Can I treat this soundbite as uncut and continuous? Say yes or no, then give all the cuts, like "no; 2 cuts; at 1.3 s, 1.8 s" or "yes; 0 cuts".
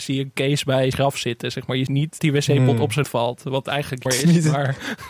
no; 5 cuts; at 0.9 s, 1.9 s, 2.2 s, 3.0 s, 4.1 s